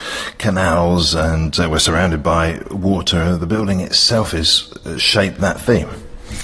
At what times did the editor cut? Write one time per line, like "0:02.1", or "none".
0:05.4